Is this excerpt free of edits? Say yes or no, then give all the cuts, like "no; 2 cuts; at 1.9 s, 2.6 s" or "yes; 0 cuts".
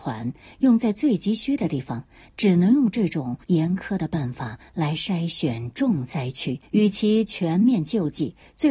no; 2 cuts; at 3.4 s, 6.6 s